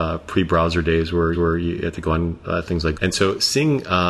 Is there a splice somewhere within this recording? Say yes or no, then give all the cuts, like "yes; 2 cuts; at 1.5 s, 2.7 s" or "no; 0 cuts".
yes; 2 cuts; at 1.3 s, 2.9 s